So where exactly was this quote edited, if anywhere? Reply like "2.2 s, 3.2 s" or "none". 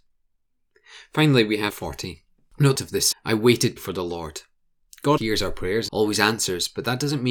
1.7 s, 2.7 s, 3.1 s, 3.8 s, 5.2 s, 5.9 s